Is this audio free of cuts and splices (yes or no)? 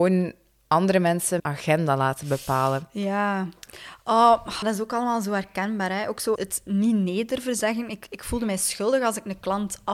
no